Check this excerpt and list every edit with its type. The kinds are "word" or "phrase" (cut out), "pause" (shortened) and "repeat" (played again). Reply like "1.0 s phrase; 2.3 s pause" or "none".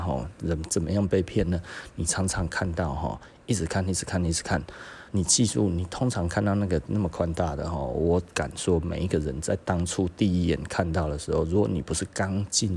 5.1 s pause